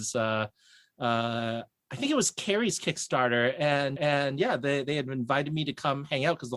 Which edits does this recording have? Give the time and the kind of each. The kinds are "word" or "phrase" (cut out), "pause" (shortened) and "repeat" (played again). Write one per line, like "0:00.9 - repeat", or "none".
0:04.0 - repeat